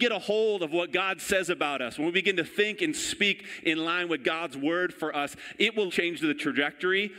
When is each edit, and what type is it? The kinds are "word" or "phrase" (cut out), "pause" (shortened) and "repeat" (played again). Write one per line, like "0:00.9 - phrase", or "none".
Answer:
0:05.9 - word